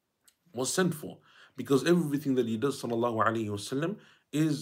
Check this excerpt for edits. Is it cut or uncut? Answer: uncut